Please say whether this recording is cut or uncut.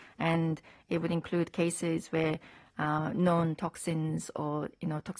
uncut